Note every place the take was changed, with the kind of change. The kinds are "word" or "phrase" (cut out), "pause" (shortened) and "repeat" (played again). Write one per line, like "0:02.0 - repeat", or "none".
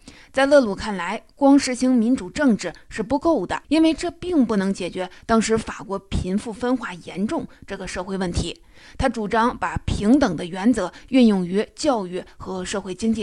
0:03.6 - pause